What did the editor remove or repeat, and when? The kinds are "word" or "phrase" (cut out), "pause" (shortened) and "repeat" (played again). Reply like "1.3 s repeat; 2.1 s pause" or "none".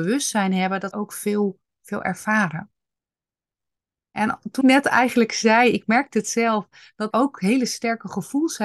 0.9 s word; 4.6 s word; 7.1 s word